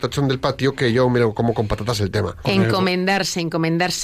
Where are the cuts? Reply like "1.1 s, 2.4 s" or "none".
none